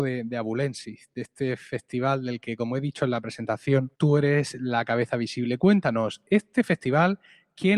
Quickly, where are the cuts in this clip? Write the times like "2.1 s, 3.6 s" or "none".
3.9 s